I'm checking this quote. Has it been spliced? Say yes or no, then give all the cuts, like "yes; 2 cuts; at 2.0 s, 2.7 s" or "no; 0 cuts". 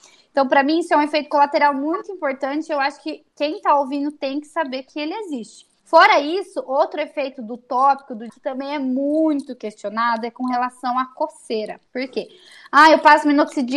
yes; 3 cuts; at 5.8 s, 8.3 s, 11.9 s